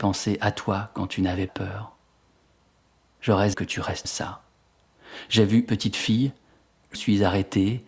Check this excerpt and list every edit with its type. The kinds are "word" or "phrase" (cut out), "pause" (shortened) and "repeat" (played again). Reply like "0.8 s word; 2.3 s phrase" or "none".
1.5 s word; 3.5 s word; 4.0 s word; 5.7 s word; 6.9 s word